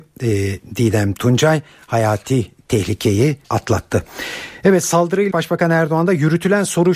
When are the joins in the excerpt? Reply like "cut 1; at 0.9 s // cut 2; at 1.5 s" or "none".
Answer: cut 1; at 3.4 s // cut 2; at 5.3 s